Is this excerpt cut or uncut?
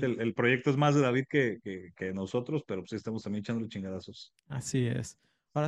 uncut